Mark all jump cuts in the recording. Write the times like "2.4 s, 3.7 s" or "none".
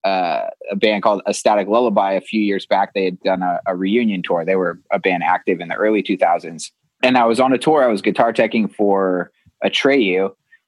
none